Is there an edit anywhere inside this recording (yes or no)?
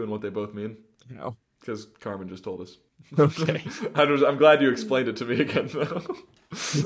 no